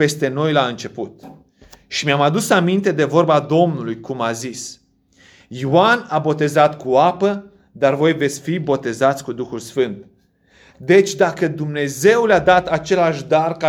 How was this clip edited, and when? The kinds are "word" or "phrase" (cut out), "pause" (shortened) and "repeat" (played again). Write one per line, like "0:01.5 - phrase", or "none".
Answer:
none